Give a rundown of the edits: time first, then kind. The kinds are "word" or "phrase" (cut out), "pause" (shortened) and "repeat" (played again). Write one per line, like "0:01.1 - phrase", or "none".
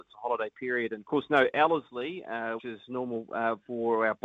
0:01.0 - word
0:02.6 - word